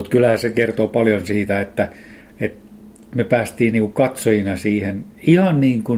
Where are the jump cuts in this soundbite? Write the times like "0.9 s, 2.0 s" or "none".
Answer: none